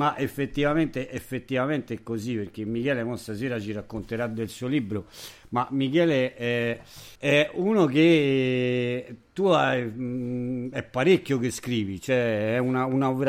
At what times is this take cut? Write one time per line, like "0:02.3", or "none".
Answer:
0:07.1